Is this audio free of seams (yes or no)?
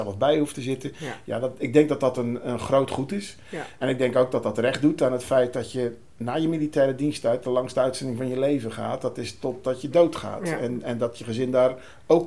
yes